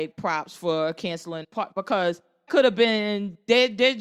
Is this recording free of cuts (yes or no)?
no